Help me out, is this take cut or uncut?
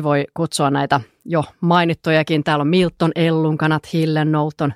uncut